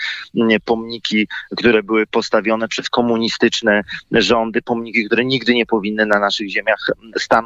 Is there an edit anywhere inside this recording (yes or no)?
no